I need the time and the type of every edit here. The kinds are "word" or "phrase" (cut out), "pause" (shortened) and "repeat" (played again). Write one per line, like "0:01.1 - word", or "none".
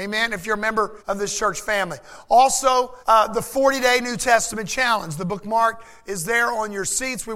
0:01.0 - pause
0:03.0 - pause